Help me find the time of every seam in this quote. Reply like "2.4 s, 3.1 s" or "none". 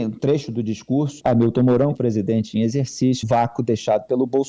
1.2 s, 1.9 s, 3.2 s